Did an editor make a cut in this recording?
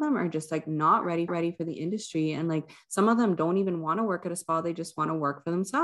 yes; 1 cut; at 1.3 s

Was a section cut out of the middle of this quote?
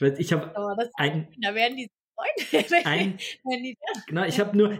yes; 1 cut; at 3.8 s

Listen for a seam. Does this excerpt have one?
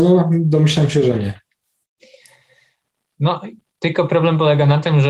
no; 0 cuts

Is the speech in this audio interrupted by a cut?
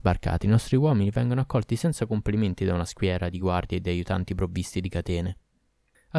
no; 0 cuts

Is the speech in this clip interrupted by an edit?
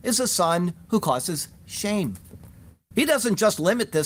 no; 0 cuts

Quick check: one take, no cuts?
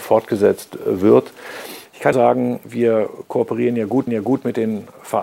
no; 3 cuts; at 2.1 s, 2.6 s, 4.1 s

